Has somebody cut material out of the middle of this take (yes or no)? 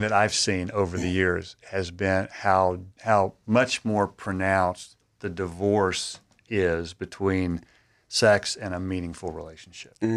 yes